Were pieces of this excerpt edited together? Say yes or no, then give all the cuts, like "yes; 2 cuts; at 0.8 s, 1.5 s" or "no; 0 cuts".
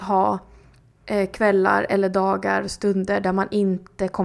no; 0 cuts